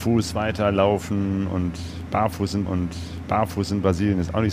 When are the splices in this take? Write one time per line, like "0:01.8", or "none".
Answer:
0:02.7